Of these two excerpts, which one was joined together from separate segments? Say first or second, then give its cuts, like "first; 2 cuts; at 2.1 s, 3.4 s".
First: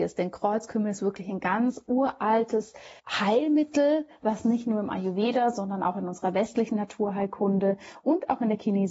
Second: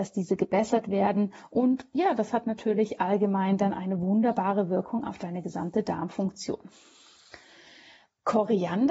first; 1 cut; at 3.0 s